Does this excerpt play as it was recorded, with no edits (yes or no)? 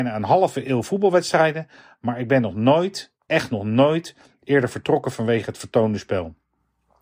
yes